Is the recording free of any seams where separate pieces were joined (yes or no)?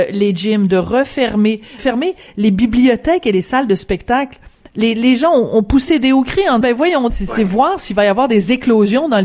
no